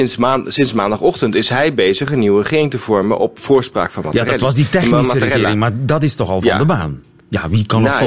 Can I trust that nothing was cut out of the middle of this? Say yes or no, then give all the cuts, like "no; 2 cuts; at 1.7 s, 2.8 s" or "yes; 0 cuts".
yes; 0 cuts